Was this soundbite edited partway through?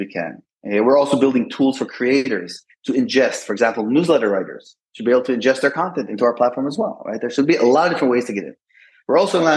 no; 0 cuts

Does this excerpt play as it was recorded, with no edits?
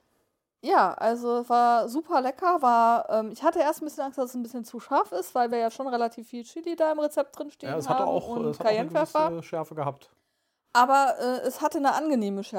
yes; 0 cuts

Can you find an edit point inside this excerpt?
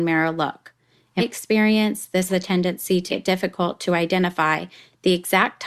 yes; 3 cuts; at 1.2 s, 2.3 s, 3.1 s

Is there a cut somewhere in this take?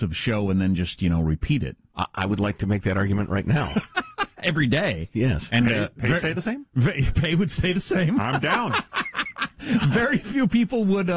no; 0 cuts

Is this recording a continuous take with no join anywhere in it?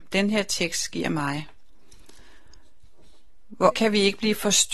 no; 1 cut; at 3.7 s

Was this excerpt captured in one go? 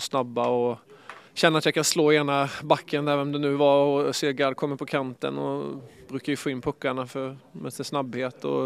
no; 1 cut; at 1.3 s

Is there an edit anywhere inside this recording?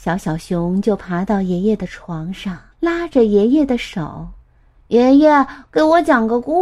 yes; 2 cuts; at 2.7 s, 4.4 s

